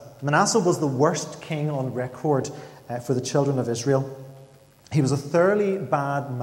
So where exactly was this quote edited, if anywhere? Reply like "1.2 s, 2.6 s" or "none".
none